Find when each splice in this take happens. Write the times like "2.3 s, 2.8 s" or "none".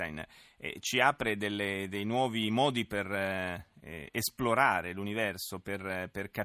none